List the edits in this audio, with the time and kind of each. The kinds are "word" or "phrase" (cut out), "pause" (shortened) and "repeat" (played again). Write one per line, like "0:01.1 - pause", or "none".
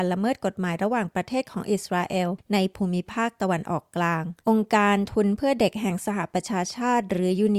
0:04.4 - pause

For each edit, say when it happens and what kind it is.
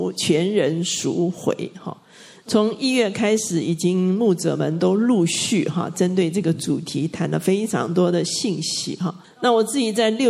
0:09.2 - pause

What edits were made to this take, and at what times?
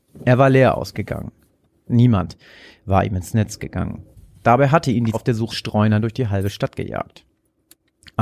0:04.1 - pause
0:05.1 - word
0:05.5 - word

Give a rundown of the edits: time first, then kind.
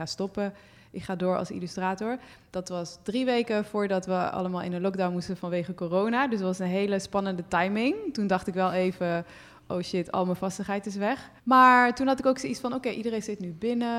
0:11.4 - pause

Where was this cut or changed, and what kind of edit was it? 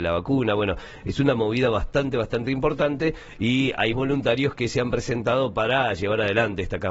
0:03.9 - word

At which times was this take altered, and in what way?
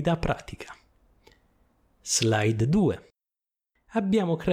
none

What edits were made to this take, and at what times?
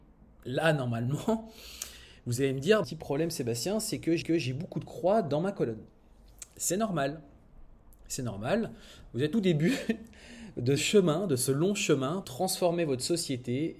0:02.8 - phrase
0:04.2 - repeat
0:09.3 - word
0:10.8 - word
0:12.2 - word

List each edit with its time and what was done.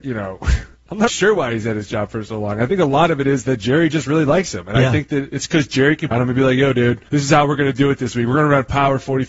0:01.1 - word
0:06.1 - phrase
0:07.1 - pause

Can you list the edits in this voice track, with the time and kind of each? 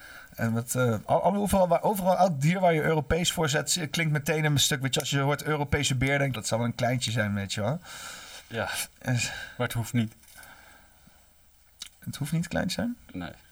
0:06.3 - phrase
0:08.9 - pause

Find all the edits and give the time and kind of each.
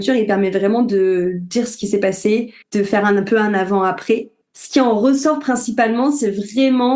0:02.6 - pause
0:04.4 - pause

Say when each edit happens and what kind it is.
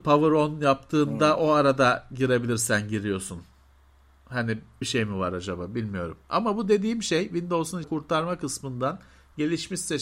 0:04.8 - word
0:07.8 - word

